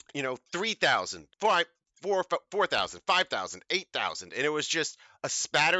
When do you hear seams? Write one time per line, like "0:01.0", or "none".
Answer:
0:01.3